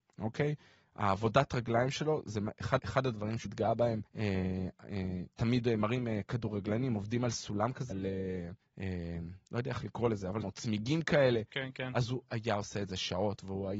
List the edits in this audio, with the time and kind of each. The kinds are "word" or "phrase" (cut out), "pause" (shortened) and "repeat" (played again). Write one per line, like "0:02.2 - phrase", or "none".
0:02.8 - repeat
0:03.5 - word
0:04.1 - pause
0:07.9 - word
0:08.6 - pause
0:10.4 - word